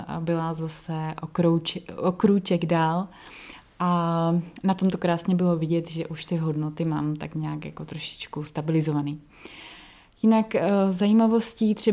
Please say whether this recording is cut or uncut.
uncut